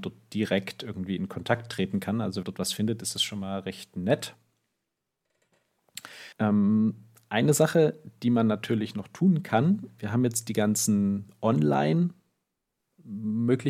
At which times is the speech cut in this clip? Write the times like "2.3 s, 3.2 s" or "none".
2.4 s, 6.3 s, 10.0 s